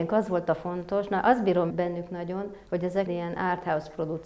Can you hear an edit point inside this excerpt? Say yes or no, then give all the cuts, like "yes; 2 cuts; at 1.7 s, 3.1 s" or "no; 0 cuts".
yes; 3 cuts; at 1.7 s, 2.7 s, 3.1 s